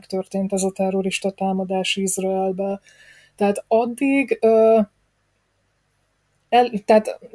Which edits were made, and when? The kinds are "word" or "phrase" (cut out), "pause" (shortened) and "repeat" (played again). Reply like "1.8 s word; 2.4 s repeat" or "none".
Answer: none